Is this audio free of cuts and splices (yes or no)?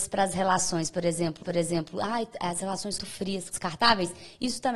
no